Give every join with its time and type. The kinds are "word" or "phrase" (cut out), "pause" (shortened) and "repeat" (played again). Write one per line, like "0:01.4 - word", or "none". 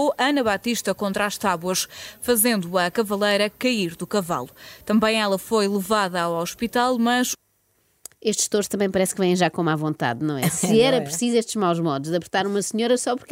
none